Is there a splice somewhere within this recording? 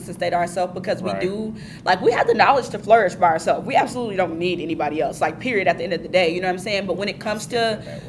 no; 0 cuts

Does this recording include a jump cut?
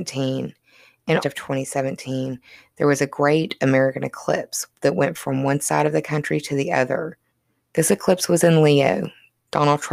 yes; 2 cuts; at 1.2 s, 7.3 s

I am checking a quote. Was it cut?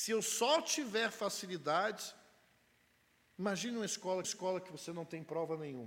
yes; 1 cut; at 4.2 s

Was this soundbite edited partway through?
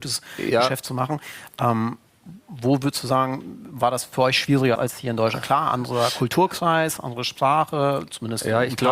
yes; 1 cut; at 4.7 s

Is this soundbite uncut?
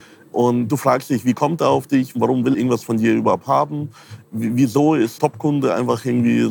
no; 2 cuts; at 2.5 s, 5.2 s

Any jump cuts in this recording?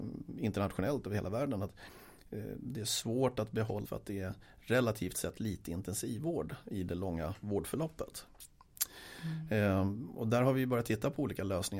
yes; 1 cut; at 3.8 s

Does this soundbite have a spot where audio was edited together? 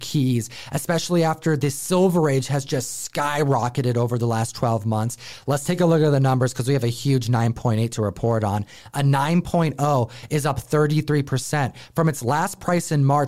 no; 0 cuts

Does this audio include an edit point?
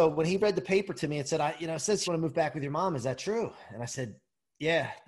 yes; 1 cut; at 2.1 s

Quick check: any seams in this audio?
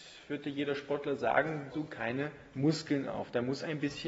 yes; 1 cut; at 1.7 s

